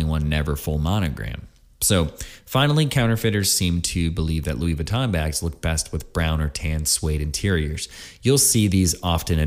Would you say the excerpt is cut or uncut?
uncut